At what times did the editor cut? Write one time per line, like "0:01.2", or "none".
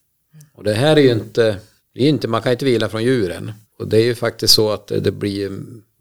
0:01.8
0:03.6